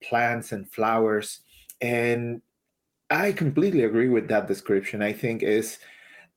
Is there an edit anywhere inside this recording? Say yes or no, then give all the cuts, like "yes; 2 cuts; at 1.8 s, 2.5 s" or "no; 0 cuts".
no; 0 cuts